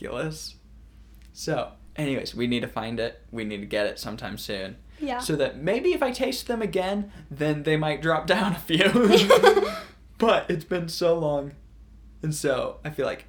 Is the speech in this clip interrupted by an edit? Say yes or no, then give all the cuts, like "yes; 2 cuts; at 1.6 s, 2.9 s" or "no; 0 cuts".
no; 0 cuts